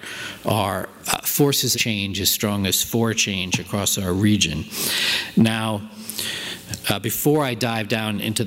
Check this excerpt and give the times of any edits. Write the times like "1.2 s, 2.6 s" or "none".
1.7 s, 2.8 s, 6.8 s